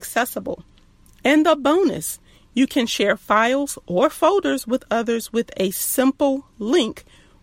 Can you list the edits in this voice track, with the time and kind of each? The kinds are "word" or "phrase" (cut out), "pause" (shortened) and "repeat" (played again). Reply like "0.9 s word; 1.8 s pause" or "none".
none